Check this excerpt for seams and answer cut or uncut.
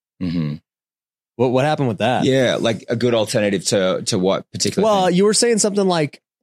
uncut